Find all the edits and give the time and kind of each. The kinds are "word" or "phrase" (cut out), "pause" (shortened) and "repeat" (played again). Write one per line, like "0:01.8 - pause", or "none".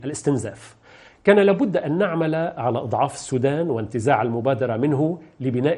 none